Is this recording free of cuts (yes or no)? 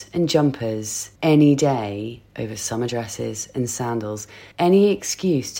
no